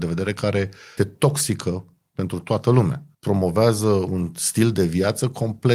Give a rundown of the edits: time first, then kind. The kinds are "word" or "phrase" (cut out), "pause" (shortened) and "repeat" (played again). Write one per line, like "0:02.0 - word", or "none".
0:01.0 - word
0:03.1 - pause